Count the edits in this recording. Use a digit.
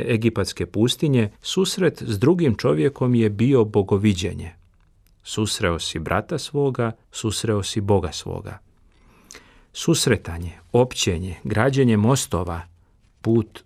2